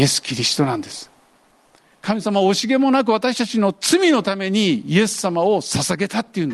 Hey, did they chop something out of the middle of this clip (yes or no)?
no